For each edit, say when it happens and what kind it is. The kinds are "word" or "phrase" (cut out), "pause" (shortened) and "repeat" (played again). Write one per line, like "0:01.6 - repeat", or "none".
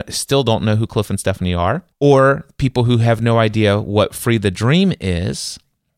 0:01.9 - pause